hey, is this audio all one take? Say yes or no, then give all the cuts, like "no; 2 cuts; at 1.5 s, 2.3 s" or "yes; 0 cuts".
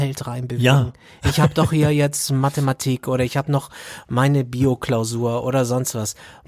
yes; 0 cuts